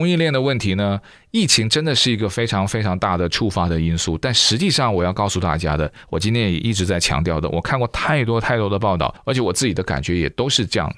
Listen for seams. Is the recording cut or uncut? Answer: uncut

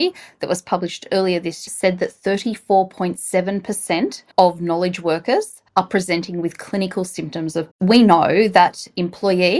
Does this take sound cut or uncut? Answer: cut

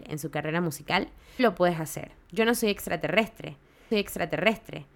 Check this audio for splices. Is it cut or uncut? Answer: cut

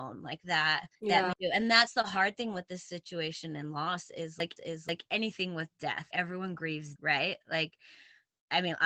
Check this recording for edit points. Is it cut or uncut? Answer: cut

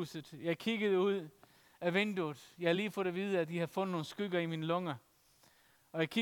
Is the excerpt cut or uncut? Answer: uncut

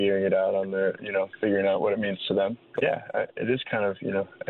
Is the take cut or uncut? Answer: cut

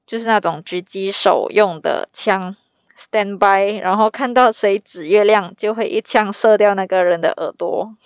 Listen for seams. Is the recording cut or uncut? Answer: uncut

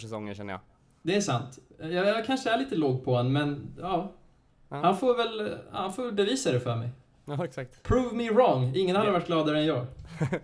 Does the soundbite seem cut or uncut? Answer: uncut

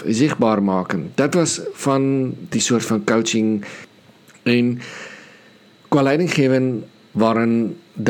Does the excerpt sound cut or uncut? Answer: uncut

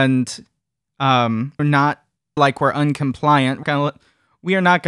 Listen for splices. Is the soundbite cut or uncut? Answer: cut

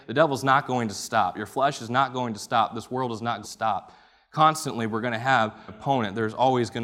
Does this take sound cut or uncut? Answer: cut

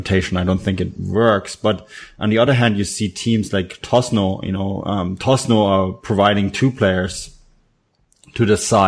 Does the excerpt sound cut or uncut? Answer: uncut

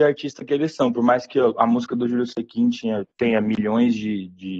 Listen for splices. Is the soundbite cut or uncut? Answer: uncut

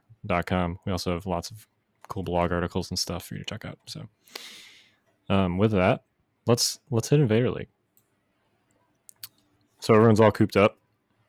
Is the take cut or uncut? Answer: uncut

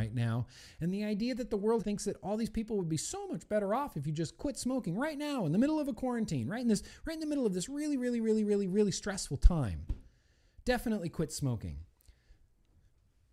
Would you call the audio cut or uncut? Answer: cut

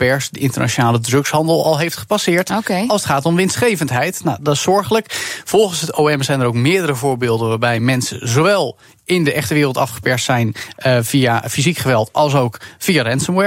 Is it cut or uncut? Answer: uncut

